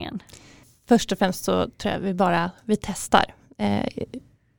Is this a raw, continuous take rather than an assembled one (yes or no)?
yes